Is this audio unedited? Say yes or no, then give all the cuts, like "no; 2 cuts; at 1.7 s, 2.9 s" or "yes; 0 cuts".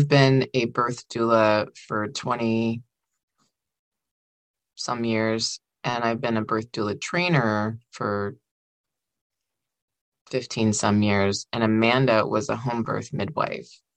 yes; 0 cuts